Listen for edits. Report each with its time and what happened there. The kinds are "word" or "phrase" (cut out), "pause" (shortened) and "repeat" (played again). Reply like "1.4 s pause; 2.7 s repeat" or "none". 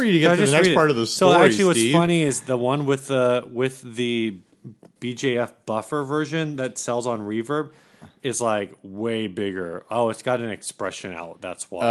5.0 s word